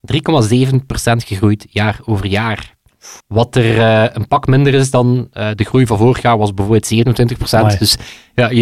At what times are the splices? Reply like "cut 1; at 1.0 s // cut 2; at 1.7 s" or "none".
cut 1; at 3.2 s

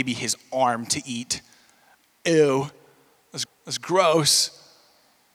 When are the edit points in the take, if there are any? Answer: cut 1; at 3.5 s

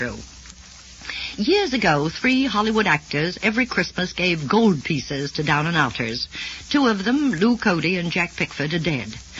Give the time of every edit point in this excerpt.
none

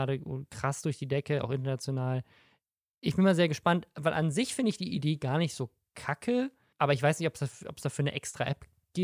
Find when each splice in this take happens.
none

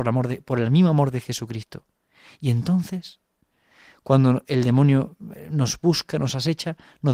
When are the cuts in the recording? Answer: none

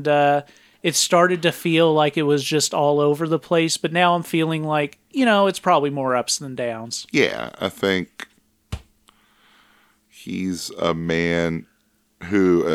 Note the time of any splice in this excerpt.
none

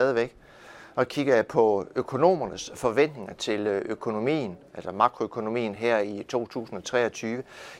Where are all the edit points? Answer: none

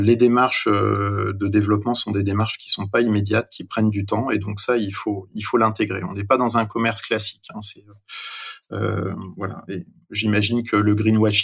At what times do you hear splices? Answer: none

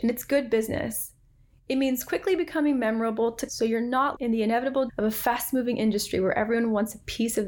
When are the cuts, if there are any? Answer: cut 1; at 3.5 s // cut 2; at 4.2 s // cut 3; at 4.9 s

